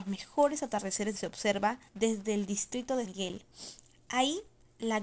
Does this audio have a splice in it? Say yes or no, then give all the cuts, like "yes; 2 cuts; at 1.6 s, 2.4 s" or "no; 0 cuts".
yes; 3 cuts; at 1.1 s, 1.9 s, 3.0 s